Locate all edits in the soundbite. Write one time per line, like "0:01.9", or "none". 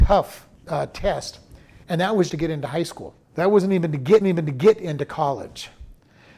0:01.8
0:02.3
0:03.2
0:04.2